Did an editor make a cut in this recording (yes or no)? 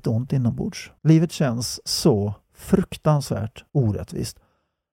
yes